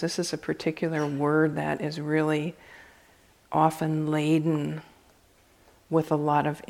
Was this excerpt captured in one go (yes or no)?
yes